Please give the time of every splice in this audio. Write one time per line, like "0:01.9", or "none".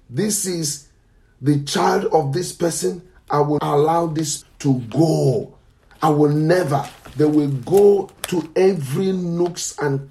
0:03.6
0:04.4